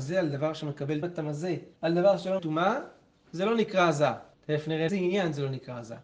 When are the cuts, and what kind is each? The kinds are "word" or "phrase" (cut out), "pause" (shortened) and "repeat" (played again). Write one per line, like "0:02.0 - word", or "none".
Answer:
0:01.0 - phrase
0:01.8 - pause
0:02.4 - word
0:04.3 - pause
0:04.9 - word